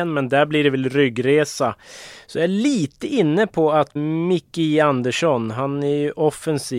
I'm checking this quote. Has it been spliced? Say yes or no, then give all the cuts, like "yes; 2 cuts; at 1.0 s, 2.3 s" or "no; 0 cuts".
yes; 1 cut; at 4.0 s